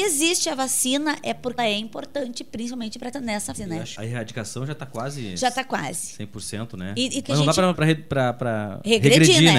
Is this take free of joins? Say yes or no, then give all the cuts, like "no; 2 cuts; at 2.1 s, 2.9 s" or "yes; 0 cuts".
no; 6 cuts; at 1.6 s, 3.1 s, 3.5 s, 3.9 s, 7.2 s, 7.7 s